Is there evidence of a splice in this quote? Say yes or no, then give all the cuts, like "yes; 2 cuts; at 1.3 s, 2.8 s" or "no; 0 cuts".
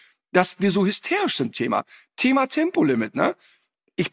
yes; 1 cut; at 1.5 s